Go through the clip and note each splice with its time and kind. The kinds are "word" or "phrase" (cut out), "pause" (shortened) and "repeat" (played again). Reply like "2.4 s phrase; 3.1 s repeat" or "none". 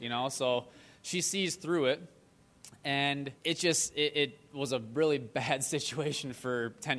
3.4 s pause